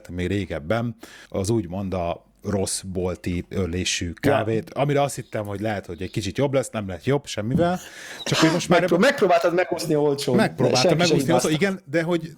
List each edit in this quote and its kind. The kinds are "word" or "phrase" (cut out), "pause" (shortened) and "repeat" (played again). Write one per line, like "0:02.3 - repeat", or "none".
0:01.3 - pause
0:03.5 - word